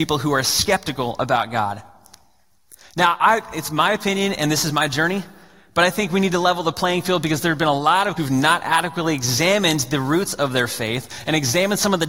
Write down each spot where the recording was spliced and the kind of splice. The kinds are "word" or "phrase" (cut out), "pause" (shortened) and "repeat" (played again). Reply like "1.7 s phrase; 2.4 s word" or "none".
8.2 s word